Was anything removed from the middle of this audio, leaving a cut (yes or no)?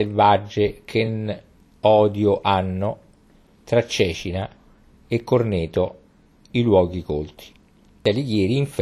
no